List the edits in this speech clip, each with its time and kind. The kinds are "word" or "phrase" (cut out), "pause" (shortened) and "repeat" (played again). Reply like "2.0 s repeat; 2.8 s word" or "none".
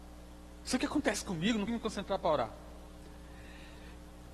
1.7 s word